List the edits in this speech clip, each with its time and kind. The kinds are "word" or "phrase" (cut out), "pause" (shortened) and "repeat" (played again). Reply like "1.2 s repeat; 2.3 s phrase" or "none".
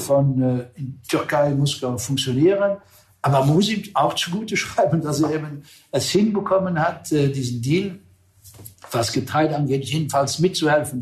none